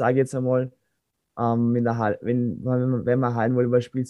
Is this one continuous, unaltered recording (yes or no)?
yes